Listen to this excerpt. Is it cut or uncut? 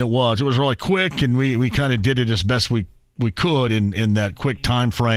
uncut